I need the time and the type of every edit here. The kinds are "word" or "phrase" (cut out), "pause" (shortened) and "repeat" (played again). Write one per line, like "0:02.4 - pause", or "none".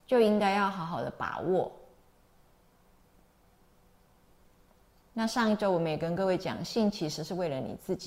none